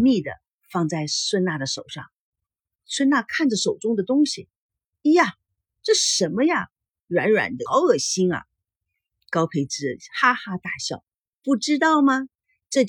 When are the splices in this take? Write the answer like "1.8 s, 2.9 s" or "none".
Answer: 7.7 s